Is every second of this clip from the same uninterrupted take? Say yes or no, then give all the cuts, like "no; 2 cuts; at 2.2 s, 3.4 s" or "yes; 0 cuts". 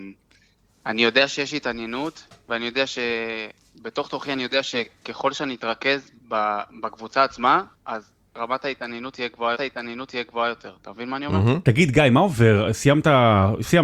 no; 4 cuts; at 3.6 s, 6.2 s, 7.7 s, 9.5 s